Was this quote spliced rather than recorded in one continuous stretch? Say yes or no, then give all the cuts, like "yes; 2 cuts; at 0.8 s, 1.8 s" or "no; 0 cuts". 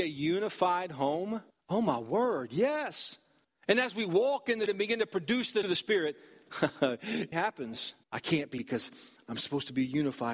yes; 7 cuts; at 1.5 s, 3.4 s, 4.7 s, 5.6 s, 7.3 s, 8.0 s, 8.6 s